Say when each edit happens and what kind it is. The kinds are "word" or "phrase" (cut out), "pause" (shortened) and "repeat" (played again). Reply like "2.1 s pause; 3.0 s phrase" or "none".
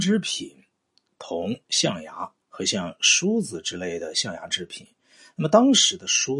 2.4 s pause

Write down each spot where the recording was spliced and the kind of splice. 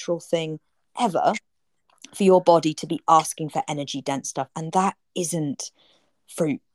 none

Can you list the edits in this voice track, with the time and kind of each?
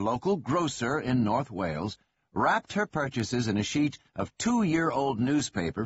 none

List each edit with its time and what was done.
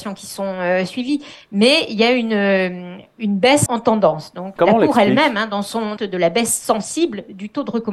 3.7 s word; 4.6 s word; 6.0 s phrase

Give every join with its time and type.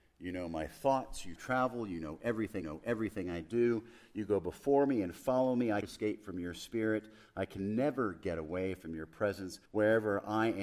1.4 s phrase; 2.6 s repeat; 5.8 s phrase; 9.7 s pause

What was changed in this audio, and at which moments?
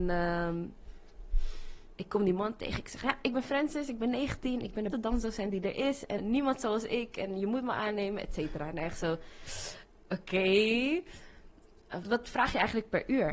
4.9 s word; 6.2 s word; 12.0 s word

